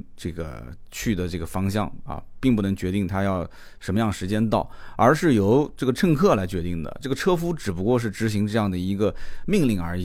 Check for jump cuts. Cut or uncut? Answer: uncut